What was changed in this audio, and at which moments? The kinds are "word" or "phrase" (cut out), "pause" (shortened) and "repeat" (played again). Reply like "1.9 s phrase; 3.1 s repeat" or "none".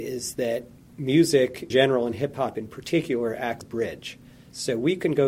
1.7 s word; 3.6 s word